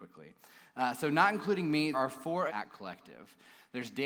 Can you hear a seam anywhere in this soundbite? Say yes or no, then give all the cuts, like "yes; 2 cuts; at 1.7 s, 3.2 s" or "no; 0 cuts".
yes; 2 cuts; at 1.9 s, 2.5 s